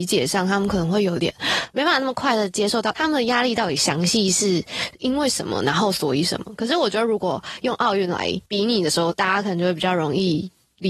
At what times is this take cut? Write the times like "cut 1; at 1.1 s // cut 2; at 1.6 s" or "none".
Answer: cut 1; at 2.9 s // cut 2; at 8.5 s